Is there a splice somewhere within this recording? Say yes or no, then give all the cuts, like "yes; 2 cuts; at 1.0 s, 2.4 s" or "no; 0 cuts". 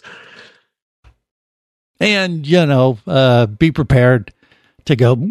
no; 0 cuts